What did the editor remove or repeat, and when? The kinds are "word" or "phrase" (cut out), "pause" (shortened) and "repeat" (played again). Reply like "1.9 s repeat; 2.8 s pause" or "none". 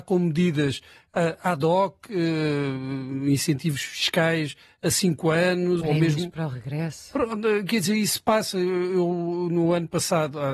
5.8 s word